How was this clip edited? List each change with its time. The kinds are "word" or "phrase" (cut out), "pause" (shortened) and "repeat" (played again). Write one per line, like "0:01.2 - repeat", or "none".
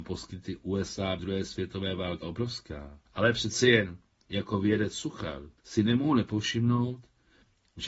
0:01.2 - word
0:02.2 - word
0:03.1 - pause
0:05.6 - pause